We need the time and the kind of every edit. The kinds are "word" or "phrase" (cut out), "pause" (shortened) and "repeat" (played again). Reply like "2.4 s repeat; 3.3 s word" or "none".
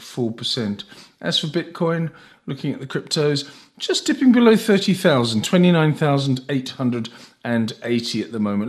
none